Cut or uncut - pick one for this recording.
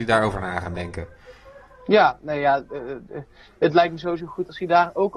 uncut